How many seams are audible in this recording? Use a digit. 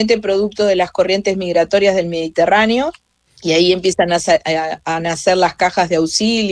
1